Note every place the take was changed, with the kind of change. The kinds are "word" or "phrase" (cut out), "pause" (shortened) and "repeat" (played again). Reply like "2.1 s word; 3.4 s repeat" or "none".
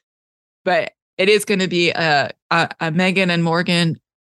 1.1 s word; 2.4 s pause